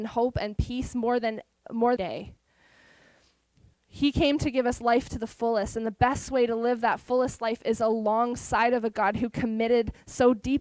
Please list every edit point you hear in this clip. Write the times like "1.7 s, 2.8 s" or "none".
2.0 s